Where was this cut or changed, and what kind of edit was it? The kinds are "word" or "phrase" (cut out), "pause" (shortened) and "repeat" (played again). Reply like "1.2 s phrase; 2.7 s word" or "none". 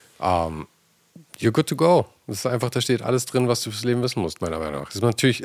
none